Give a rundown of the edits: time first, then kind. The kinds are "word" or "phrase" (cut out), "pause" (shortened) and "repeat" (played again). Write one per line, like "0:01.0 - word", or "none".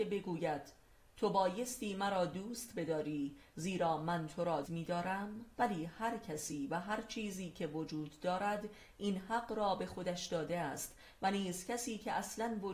0:04.6 - word
0:05.5 - pause